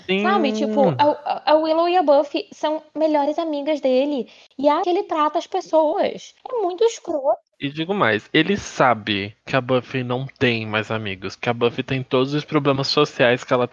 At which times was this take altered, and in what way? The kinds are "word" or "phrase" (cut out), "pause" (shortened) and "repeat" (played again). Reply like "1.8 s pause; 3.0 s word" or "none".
4.8 s word; 6.4 s pause; 9.4 s pause